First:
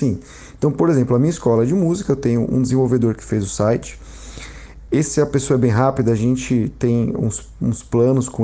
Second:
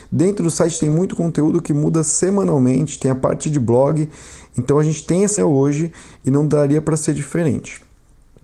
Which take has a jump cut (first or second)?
second